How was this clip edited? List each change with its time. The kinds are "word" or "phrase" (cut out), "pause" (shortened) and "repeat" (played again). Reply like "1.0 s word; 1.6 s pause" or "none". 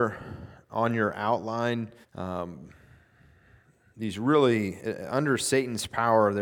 2.0 s pause